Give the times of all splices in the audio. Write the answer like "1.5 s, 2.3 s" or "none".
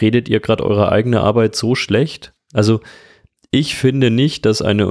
none